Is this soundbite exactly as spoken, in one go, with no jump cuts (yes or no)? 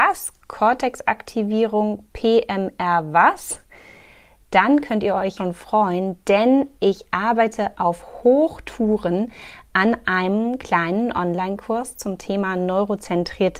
no